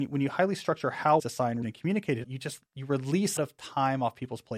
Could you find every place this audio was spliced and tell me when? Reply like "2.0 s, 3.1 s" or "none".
1.2 s, 1.6 s, 2.2 s, 2.7 s, 3.4 s